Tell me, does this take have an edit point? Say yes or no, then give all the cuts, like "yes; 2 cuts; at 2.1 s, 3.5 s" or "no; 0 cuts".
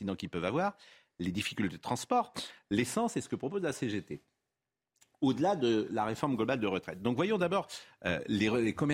no; 0 cuts